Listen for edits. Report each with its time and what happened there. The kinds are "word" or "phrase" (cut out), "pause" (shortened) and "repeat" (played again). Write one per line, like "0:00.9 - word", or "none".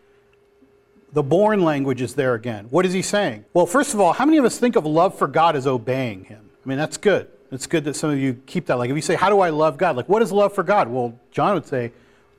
0:03.5 - pause
0:06.6 - pause